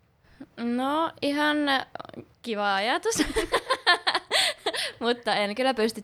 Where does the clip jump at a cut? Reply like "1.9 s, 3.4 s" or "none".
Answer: none